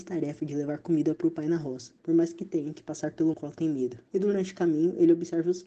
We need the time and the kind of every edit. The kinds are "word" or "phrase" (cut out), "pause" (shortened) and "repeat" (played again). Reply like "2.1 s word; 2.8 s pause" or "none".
2.0 s pause; 3.3 s phrase; 4.1 s pause